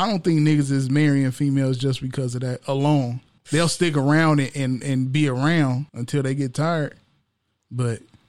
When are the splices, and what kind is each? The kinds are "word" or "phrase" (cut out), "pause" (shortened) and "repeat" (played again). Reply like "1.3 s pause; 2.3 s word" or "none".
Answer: 3.4 s pause; 5.9 s pause